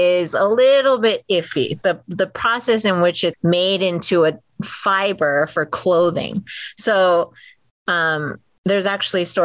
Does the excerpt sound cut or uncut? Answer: cut